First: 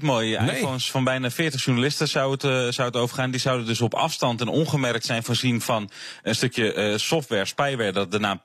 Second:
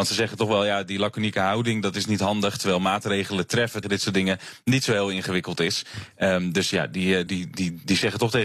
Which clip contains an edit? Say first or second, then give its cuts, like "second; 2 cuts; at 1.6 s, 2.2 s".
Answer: second; 2 cuts; at 3.8 s, 7.3 s